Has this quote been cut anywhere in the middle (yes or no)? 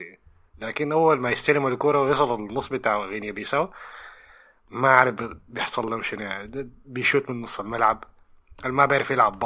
no